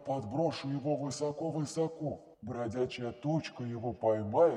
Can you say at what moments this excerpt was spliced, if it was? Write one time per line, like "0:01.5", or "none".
0:02.3